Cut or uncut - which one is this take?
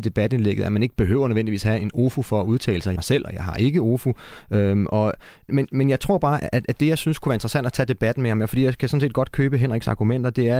cut